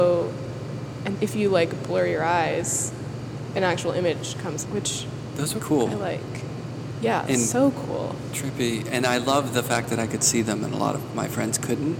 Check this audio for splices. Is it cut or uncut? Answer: cut